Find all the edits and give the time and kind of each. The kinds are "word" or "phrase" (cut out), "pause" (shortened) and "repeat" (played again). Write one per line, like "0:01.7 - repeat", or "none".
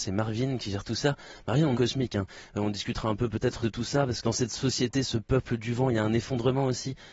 0:01.7 - phrase
0:03.6 - phrase
0:04.2 - word